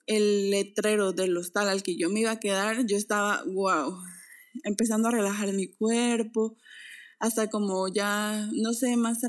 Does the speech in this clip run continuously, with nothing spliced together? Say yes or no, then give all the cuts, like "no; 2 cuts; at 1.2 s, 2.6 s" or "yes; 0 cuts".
yes; 0 cuts